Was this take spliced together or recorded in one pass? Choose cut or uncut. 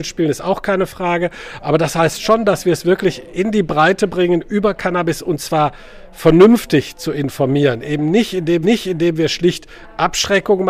cut